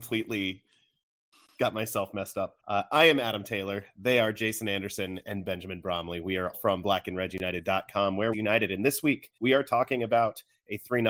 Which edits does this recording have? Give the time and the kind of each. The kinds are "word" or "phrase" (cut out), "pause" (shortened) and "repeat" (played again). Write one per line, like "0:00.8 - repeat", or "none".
0:02.6 - pause
0:06.5 - word
0:08.3 - phrase
0:09.4 - pause